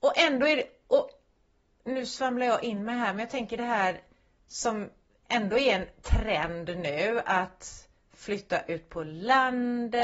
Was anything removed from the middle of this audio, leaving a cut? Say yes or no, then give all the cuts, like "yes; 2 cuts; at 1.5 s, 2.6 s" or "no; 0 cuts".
no; 0 cuts